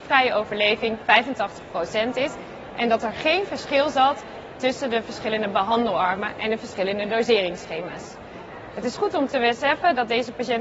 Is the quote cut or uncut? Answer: uncut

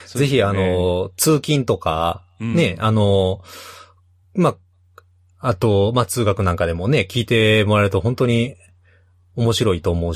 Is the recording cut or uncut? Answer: uncut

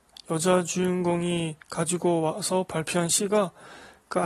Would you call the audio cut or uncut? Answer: uncut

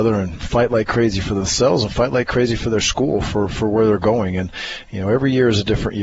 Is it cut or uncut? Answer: uncut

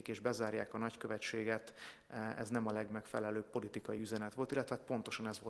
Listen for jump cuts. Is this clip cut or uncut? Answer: uncut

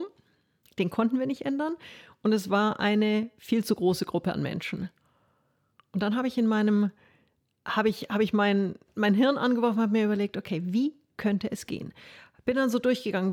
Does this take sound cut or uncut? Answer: uncut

